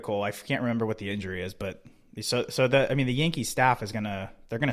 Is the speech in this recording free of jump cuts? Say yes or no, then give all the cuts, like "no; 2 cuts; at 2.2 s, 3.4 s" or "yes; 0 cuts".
yes; 0 cuts